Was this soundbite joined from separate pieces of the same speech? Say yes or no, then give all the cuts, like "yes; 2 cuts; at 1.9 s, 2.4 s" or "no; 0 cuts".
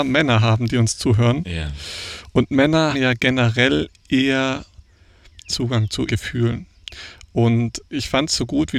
yes; 3 cuts; at 2.9 s, 5.5 s, 6.1 s